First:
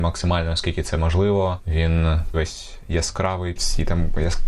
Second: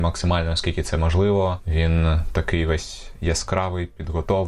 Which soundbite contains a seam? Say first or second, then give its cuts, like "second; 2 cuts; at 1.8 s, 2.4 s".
first; 2 cuts; at 2.3 s, 3.6 s